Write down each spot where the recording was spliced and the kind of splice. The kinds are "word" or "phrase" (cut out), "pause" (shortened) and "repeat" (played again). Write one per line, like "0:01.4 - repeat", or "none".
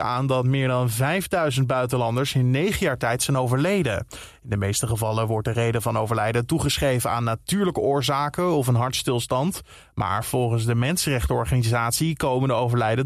none